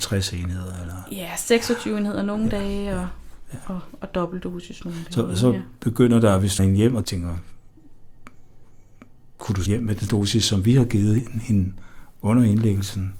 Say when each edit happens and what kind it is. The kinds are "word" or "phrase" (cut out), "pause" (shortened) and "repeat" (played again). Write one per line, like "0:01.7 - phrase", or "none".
0:06.6 - word
0:07.0 - phrase
0:09.7 - word
0:10.1 - word